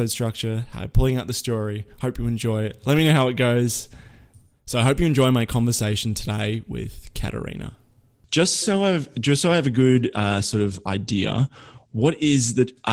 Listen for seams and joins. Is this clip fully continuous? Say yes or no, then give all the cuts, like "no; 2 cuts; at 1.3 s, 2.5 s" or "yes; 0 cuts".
yes; 0 cuts